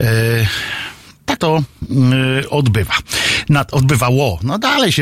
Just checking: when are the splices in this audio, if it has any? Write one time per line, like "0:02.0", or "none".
0:01.4